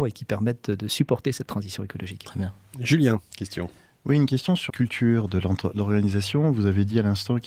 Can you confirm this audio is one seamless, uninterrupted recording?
no; 1 cut; at 4.7 s

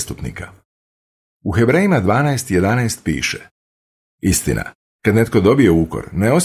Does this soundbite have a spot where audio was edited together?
no; 0 cuts

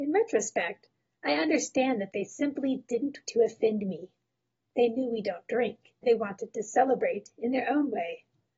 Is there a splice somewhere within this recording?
yes; 2 cuts; at 3.2 s, 6.0 s

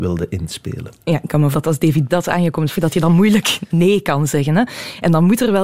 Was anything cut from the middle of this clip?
yes; 3 cuts; at 1.5 s, 2.1 s, 2.7 s

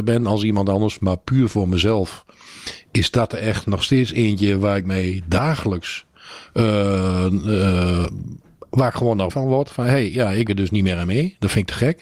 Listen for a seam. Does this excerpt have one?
yes; 2 cuts; at 9.3 s, 10.5 s

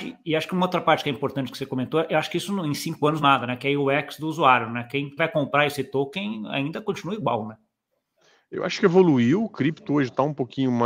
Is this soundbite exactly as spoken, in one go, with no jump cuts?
no; 2 cuts; at 3.2 s, 5.2 s

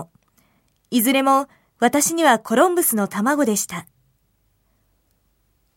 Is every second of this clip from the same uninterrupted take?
yes; 0 cuts

